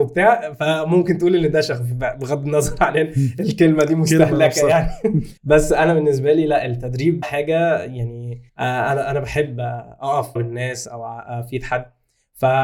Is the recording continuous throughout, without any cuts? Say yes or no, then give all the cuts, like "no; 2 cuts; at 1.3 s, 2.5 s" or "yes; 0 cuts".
no; 4 cuts; at 5.4 s, 7.2 s, 8.5 s, 10.4 s